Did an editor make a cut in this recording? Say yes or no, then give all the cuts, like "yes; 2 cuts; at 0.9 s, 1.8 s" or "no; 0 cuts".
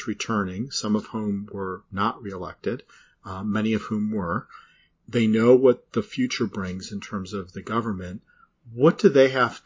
no; 0 cuts